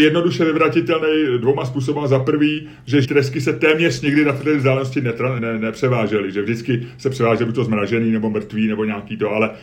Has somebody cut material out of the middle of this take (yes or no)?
yes